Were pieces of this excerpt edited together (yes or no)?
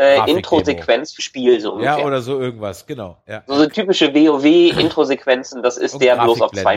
yes